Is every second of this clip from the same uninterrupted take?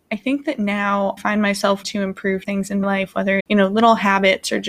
no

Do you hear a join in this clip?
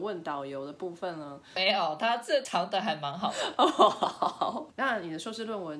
yes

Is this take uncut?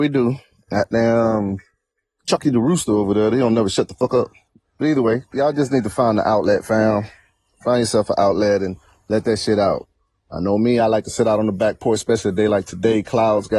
yes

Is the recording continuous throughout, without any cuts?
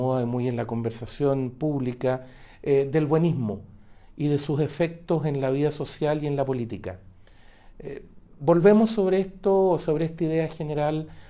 yes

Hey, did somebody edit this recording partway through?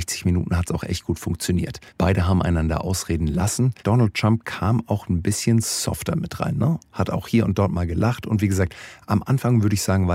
yes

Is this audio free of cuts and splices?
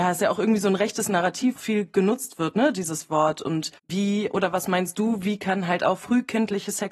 no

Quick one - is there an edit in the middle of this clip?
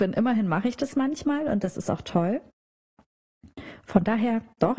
no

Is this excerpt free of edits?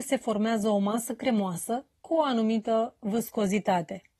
yes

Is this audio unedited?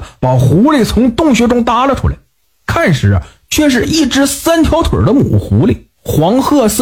yes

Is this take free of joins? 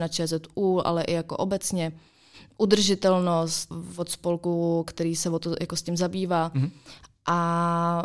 yes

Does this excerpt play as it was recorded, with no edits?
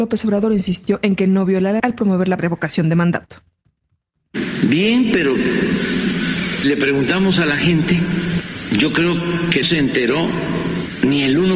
no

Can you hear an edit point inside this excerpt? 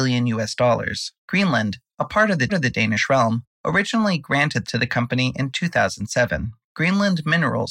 yes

